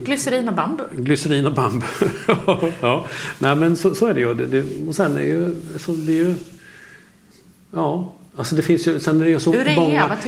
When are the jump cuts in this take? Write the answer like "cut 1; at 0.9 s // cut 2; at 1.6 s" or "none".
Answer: none